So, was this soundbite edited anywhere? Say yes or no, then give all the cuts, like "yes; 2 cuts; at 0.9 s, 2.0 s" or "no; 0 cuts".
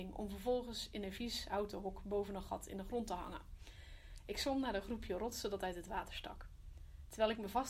no; 0 cuts